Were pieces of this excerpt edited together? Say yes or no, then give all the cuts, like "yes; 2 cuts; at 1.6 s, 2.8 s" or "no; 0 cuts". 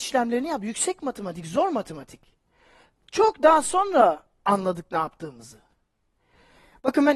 no; 0 cuts